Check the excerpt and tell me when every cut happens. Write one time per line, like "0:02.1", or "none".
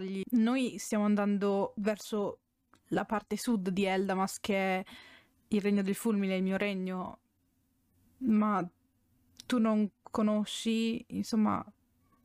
none